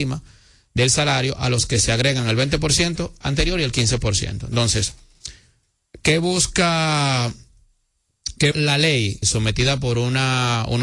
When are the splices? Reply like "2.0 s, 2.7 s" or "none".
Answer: 8.5 s, 9.2 s